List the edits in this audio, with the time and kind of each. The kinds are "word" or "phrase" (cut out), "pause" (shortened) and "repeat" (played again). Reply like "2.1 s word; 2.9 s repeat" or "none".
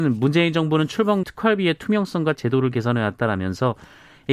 1.2 s word; 2.4 s phrase